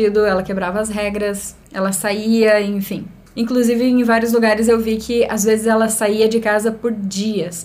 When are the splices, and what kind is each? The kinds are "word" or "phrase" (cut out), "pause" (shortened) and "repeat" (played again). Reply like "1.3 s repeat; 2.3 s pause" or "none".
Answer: none